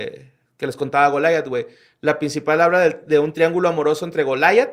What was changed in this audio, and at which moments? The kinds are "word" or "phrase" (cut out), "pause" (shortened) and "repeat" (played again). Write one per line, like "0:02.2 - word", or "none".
none